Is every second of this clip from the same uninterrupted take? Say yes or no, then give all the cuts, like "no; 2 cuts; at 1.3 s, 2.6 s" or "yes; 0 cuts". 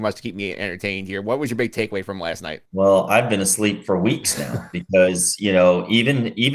no; 1 cut; at 2.7 s